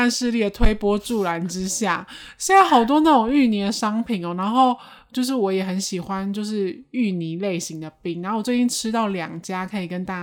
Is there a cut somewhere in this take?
no; 0 cuts

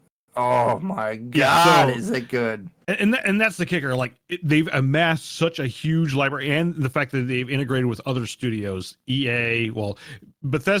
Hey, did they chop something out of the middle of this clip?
no; 0 cuts

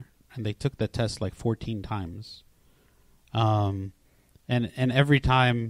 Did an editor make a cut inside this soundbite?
no; 0 cuts

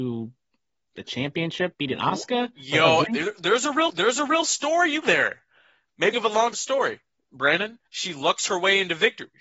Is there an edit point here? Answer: yes; 7 cuts; at 1.7 s, 3.1 s, 3.9 s, 5.0 s, 6.1 s, 6.5 s, 7.9 s

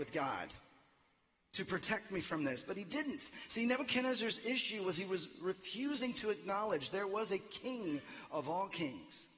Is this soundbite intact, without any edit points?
yes; 0 cuts

